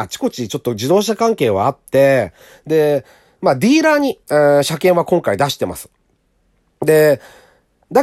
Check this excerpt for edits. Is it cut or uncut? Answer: cut